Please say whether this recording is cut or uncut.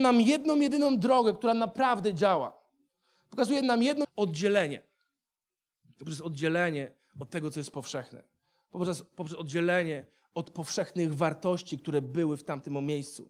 cut